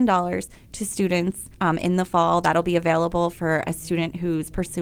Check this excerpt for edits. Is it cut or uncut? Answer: cut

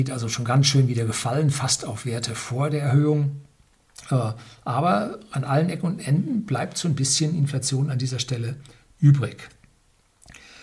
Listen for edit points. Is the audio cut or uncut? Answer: uncut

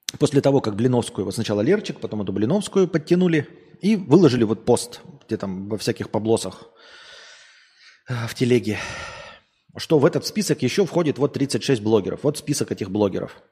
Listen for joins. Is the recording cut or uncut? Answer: uncut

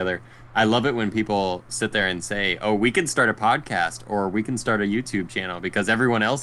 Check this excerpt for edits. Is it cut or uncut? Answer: uncut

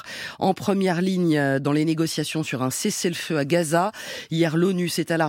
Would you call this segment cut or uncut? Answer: uncut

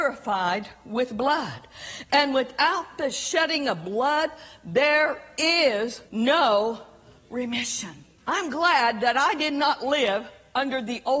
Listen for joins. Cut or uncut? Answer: cut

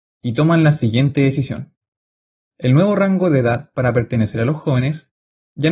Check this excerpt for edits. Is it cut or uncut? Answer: uncut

